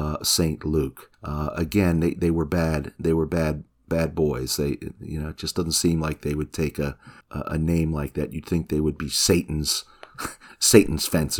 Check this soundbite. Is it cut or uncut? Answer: cut